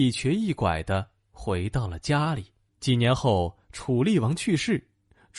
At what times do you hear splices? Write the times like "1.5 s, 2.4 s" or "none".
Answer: 2.7 s